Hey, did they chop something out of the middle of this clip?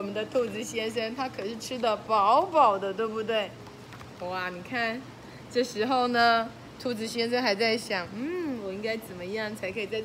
no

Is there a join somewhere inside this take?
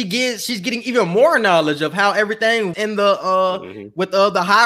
yes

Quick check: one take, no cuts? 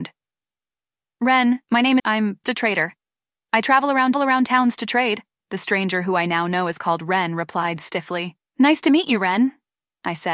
no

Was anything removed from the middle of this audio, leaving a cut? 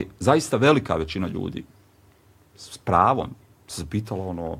no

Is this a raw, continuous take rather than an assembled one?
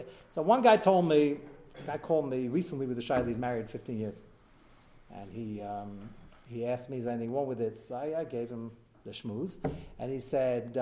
yes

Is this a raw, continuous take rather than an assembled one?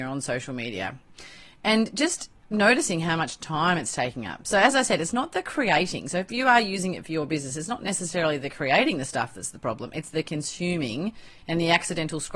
yes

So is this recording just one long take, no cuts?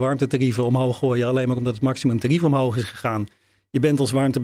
yes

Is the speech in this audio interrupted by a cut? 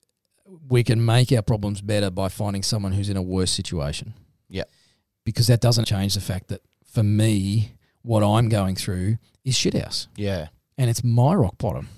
yes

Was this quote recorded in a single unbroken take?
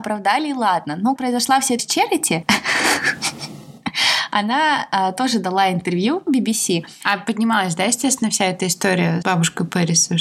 no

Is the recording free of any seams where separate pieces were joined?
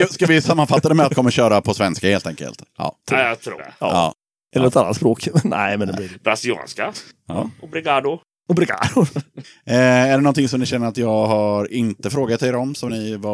no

